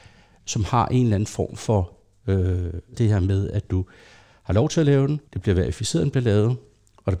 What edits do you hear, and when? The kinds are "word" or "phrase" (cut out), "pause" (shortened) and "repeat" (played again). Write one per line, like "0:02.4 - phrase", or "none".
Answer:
0:02.9 - word
0:05.3 - pause